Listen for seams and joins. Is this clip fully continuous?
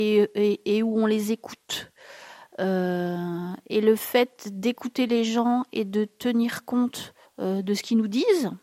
no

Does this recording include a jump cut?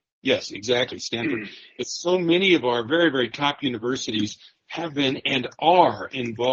no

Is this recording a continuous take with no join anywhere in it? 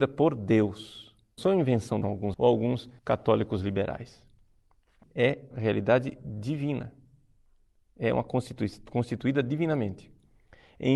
no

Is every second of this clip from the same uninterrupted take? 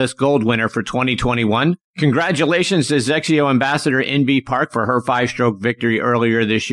no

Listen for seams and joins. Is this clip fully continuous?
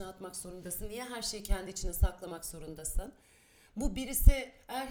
yes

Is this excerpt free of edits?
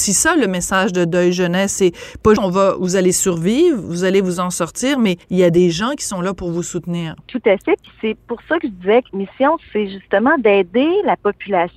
no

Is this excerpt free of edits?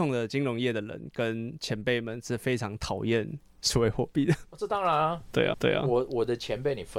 no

